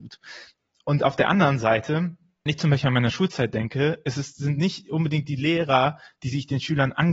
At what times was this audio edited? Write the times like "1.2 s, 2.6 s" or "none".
2.5 s

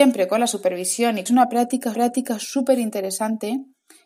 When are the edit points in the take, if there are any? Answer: 1.3 s, 1.9 s

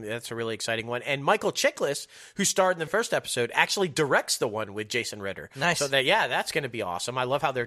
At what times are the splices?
2.9 s

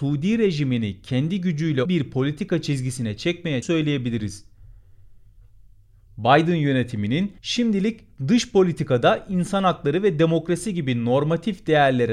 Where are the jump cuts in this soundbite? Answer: 1.9 s, 3.6 s, 7.4 s

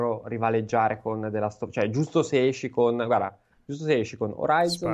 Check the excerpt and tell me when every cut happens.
none

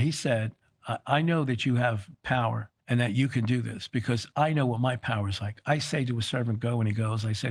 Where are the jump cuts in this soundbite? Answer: 2.8 s

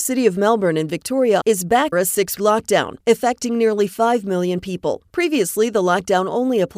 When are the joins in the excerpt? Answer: 1.4 s, 1.9 s, 2.4 s

